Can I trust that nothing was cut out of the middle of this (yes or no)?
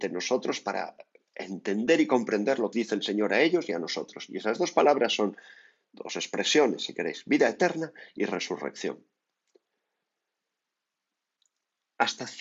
no